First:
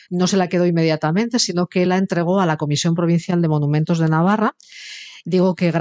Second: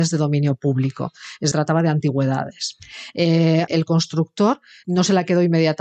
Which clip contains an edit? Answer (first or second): second